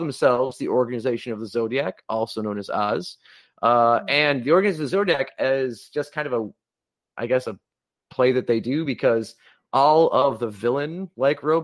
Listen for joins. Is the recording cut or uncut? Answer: uncut